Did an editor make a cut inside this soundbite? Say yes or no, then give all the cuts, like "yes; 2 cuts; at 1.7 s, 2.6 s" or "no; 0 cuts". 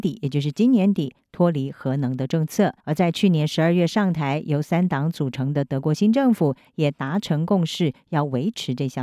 yes; 1 cut; at 2.8 s